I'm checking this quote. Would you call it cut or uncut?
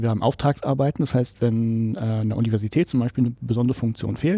uncut